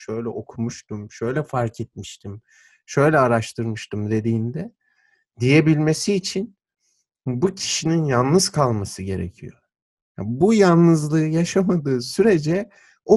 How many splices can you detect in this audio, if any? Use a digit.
0